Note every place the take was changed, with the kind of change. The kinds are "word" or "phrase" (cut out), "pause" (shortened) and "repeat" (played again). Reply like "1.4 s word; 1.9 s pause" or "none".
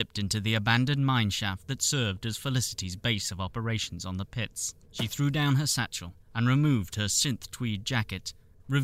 4.8 s pause; 6.2 s pause